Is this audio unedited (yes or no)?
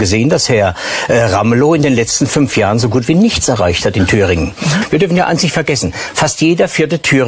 yes